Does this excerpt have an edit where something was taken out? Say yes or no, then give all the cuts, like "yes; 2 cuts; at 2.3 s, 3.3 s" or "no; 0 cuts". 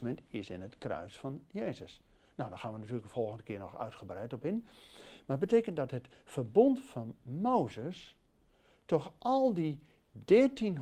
no; 0 cuts